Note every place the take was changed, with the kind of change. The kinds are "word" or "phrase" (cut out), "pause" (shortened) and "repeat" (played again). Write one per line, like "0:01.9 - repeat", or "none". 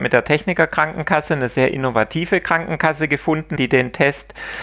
0:03.6 - word